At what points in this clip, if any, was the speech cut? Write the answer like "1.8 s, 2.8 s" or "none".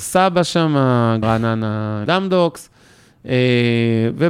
1.2 s, 2.1 s